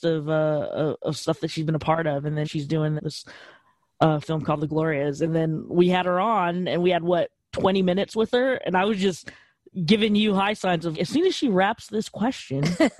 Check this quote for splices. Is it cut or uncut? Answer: cut